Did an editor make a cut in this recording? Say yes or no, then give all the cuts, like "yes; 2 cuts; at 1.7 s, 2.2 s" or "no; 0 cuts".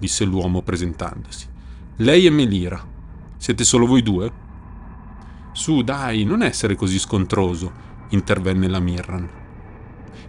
yes; 1 cut; at 3.3 s